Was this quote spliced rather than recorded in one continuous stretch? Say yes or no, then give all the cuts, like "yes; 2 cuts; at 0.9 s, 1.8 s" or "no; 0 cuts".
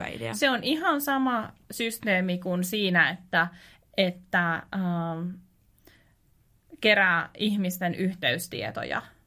no; 0 cuts